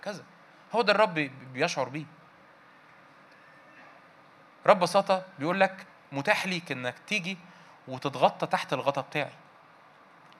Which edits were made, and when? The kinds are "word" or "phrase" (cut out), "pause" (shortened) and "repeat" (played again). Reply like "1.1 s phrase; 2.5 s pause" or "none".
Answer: 5.9 s pause